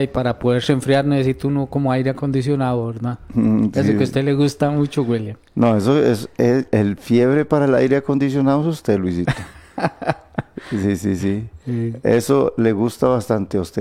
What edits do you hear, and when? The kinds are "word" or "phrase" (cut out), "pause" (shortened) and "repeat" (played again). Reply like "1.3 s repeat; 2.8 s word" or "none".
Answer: none